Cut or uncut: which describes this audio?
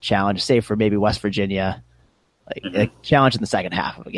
uncut